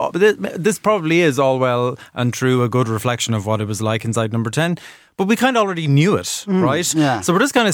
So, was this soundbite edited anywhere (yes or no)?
no